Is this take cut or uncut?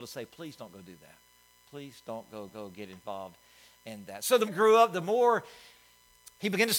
cut